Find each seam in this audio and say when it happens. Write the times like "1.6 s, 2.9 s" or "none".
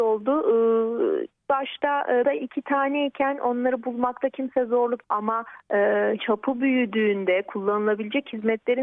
1.4 s, 2.2 s, 5.0 s, 6.2 s